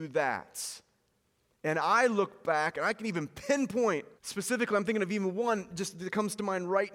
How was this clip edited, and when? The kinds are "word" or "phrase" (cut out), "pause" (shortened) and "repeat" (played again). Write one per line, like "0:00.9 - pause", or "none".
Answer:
0:04.2 - pause